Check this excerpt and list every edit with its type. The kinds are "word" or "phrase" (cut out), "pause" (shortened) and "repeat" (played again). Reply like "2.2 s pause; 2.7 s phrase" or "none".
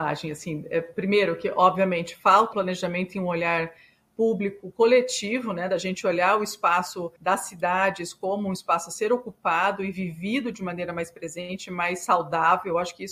2.5 s word; 7.2 s pause